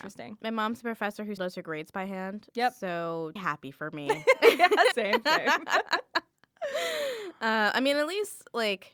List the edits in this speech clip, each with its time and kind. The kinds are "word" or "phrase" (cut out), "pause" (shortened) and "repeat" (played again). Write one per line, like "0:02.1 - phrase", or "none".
0:01.4 - word
0:03.4 - phrase
0:04.9 - word